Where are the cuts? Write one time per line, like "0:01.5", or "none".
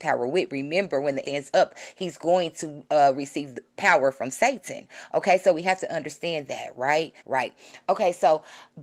0:01.2
0:07.2